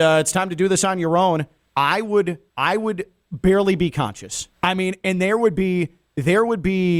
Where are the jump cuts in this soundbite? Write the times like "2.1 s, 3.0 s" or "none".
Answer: 1.6 s, 2.5 s, 4.5 s